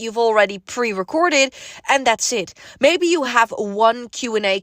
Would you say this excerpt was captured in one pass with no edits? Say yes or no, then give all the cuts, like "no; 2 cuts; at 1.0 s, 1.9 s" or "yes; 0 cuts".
yes; 0 cuts